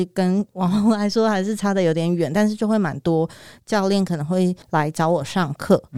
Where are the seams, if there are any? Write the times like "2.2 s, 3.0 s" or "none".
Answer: 4.6 s

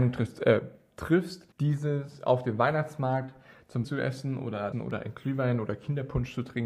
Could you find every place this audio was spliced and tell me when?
1.5 s, 3.8 s, 4.7 s

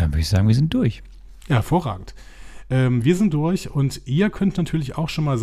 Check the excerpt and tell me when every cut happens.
none

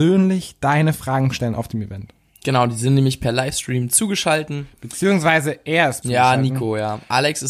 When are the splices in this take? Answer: 6.0 s

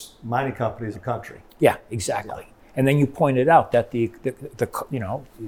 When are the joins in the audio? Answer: 0.9 s

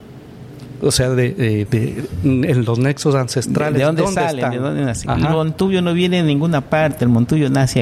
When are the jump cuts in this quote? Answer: 1.7 s

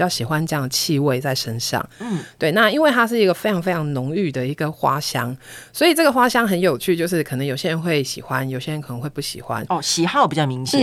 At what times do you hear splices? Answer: none

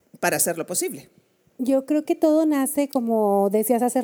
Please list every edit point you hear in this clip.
none

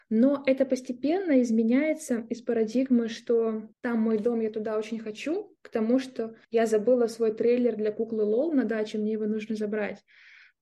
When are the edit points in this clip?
3.7 s, 6.4 s

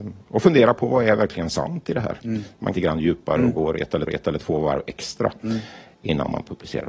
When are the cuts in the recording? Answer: 2.7 s, 4.1 s

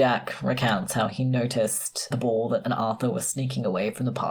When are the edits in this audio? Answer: 2.1 s, 2.6 s

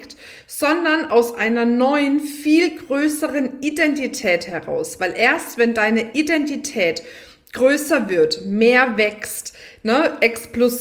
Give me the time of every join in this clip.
none

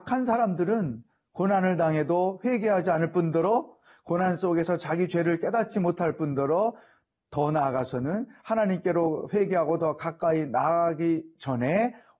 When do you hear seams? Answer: none

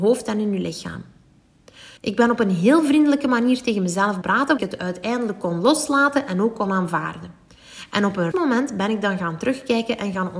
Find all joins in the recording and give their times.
2.0 s, 4.2 s, 4.6 s, 8.3 s

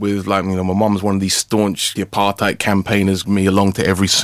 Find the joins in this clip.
2.0 s, 3.2 s

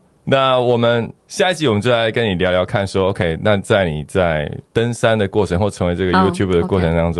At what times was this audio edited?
1.2 s, 4.7 s

